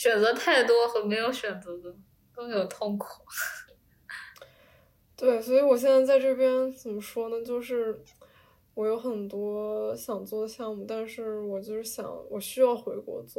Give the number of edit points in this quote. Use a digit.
0